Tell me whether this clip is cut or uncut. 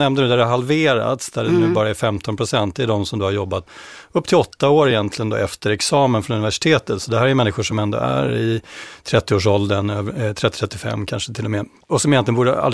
uncut